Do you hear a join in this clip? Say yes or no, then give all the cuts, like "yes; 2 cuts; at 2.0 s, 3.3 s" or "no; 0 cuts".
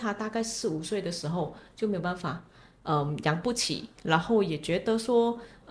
no; 0 cuts